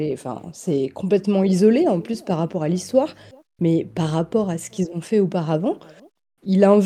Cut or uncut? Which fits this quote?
uncut